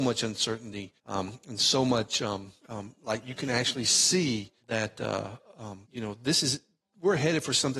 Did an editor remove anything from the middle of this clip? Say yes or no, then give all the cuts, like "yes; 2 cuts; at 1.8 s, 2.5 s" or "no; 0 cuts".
yes; 4 cuts; at 1.0 s, 2.6 s, 4.6 s, 5.8 s